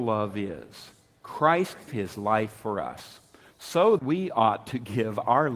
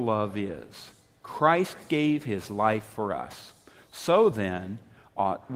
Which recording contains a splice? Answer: first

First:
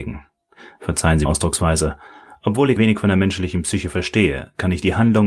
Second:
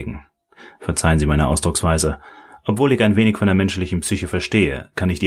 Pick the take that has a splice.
first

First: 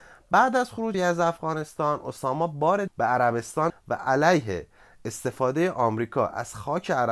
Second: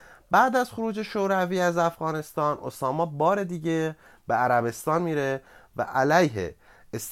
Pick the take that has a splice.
first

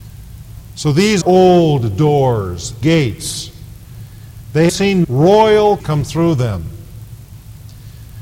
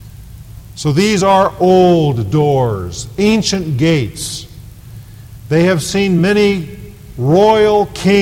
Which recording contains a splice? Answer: first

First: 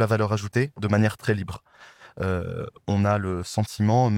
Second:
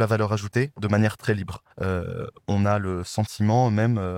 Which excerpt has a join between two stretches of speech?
second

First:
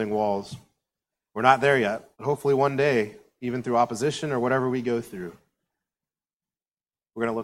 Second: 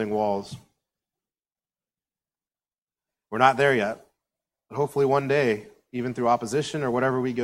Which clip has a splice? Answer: first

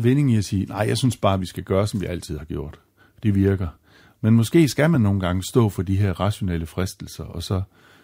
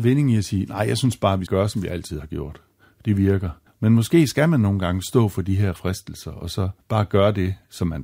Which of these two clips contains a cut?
second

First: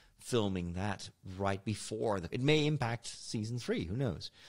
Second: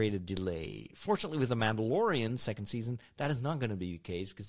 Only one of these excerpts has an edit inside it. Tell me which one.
first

